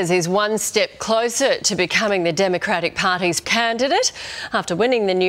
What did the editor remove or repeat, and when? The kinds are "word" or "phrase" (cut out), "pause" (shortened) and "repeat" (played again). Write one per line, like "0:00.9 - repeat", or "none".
0:03.4 - word